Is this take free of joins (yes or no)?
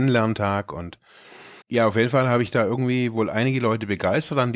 no